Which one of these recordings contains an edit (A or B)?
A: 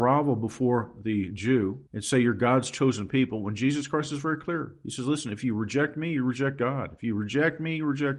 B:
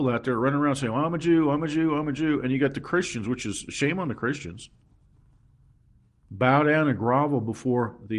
A